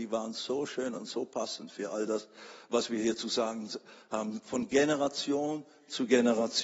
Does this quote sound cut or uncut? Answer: uncut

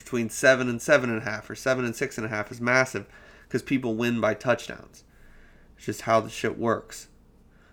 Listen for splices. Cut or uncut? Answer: uncut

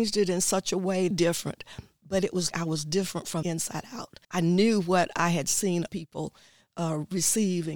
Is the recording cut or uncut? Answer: cut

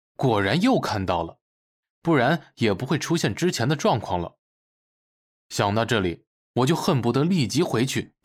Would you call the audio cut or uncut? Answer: uncut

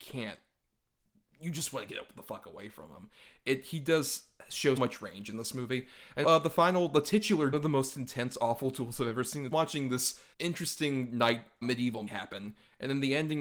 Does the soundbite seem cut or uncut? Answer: cut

